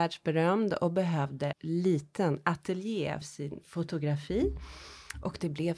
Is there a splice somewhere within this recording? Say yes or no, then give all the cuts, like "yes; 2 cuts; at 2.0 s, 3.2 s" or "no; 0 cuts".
yes; 2 cuts; at 1.5 s, 3.2 s